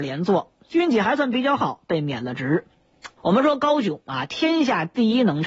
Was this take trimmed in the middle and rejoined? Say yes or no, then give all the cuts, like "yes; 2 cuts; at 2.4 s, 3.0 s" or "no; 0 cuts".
yes; 1 cut; at 3.2 s